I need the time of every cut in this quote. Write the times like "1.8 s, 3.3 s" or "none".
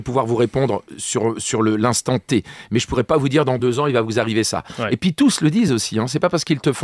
none